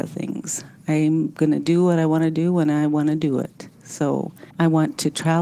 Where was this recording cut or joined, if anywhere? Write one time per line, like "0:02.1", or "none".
0:04.5